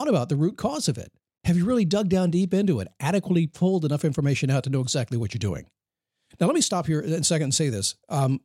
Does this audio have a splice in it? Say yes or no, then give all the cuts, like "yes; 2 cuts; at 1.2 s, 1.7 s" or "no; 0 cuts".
yes; 1 cut; at 1.2 s